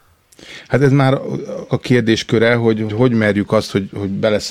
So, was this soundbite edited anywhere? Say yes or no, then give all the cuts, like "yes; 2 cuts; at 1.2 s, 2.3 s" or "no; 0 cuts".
yes; 2 cuts; at 1.7 s, 2.9 s